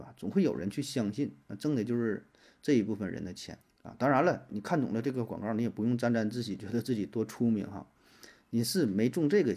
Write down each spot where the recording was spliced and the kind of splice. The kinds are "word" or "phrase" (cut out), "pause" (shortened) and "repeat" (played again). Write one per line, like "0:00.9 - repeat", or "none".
0:03.6 - pause